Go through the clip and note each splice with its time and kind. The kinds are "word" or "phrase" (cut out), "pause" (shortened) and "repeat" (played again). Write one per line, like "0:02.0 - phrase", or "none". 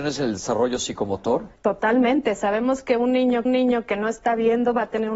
0:01.6 - pause
0:03.5 - repeat